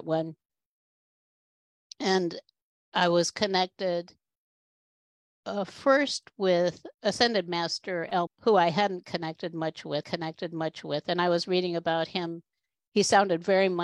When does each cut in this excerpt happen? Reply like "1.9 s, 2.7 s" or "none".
6.9 s, 8.3 s, 10.0 s